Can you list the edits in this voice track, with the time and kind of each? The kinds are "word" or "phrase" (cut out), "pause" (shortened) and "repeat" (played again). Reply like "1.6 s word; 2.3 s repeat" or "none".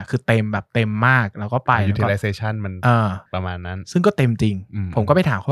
3.3 s pause